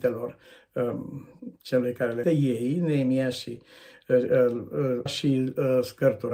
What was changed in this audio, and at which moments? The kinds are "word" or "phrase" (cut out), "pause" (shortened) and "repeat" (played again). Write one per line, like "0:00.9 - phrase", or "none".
0:01.6 - pause
0:02.2 - word
0:05.1 - word